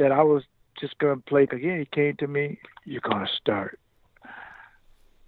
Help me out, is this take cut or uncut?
cut